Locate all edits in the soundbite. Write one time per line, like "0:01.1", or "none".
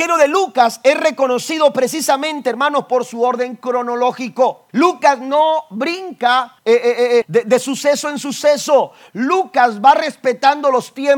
0:04.7
0:06.6
0:07.2